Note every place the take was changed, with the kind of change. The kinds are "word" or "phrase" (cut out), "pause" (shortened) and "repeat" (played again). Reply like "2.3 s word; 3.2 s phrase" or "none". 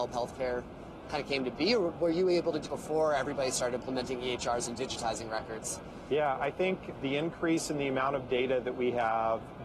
2.7 s word